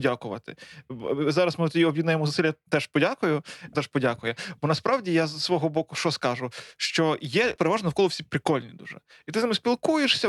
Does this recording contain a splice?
yes; 2 cuts; at 3.7 s, 7.6 s

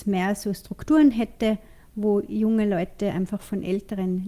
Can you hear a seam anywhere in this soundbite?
no; 0 cuts

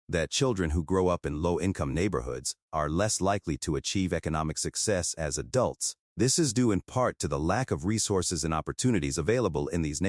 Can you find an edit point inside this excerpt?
yes; 1 cut; at 6.0 s

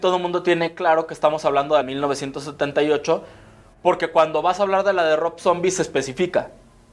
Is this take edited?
yes; 1 cut; at 1.8 s

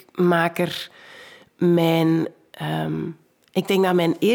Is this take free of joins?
yes; 0 cuts

